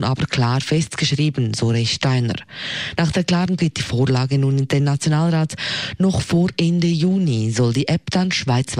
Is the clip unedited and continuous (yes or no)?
no